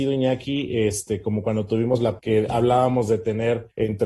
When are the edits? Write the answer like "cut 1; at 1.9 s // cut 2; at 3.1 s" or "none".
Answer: cut 1; at 2.2 s